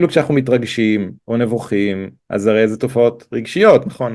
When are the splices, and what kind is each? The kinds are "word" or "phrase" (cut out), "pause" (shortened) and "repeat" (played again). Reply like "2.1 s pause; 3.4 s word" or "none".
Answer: 1.2 s pause; 2.2 s pause